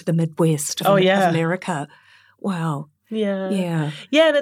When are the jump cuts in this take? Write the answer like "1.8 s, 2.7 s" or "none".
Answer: none